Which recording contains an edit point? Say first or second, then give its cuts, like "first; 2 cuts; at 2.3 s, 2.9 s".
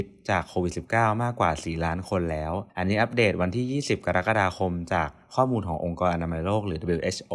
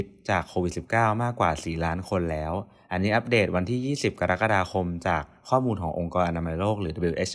first; 1 cut; at 2.7 s